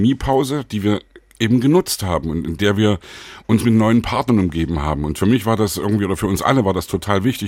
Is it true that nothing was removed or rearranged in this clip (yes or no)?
yes